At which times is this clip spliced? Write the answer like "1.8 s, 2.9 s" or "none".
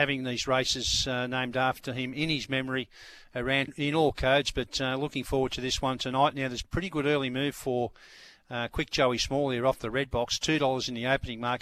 3.7 s, 6.6 s